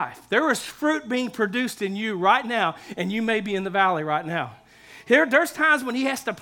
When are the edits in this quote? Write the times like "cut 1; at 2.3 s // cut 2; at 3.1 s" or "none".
none